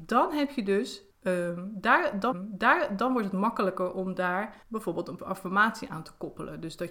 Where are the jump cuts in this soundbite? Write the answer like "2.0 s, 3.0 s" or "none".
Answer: 1.1 s, 2.3 s, 4.6 s, 5.2 s